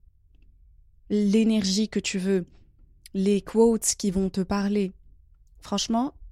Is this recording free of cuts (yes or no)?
yes